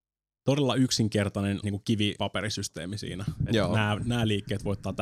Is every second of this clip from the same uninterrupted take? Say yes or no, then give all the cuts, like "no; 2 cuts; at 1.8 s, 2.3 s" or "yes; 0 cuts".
no; 3 cuts; at 1.6 s, 2.2 s, 4.0 s